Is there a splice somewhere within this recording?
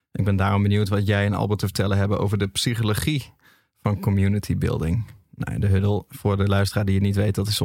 no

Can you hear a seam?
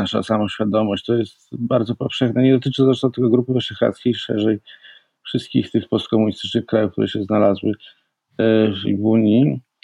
yes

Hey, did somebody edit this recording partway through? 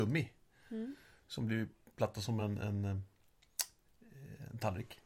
no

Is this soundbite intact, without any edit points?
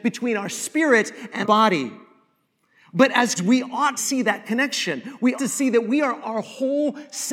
no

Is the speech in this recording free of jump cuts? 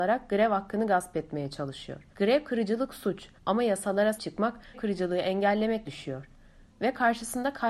no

